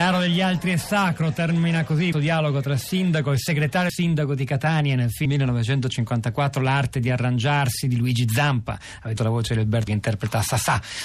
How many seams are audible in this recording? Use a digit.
5